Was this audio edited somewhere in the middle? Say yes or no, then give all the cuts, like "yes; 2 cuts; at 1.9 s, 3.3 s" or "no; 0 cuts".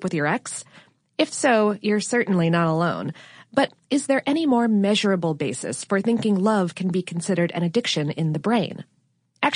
no; 0 cuts